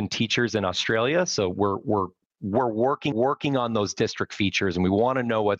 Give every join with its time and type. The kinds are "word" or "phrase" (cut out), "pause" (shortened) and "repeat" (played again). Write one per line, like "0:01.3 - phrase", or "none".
0:03.1 - repeat